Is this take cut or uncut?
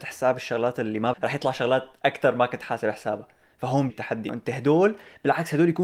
cut